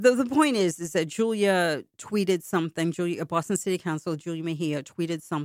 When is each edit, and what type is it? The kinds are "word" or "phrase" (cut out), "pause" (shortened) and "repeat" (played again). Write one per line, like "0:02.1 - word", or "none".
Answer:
0:01.9 - pause